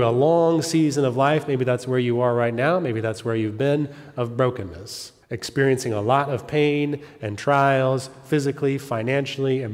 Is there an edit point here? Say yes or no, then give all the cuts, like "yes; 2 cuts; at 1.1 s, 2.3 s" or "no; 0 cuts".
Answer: yes; 1 cut; at 5.2 s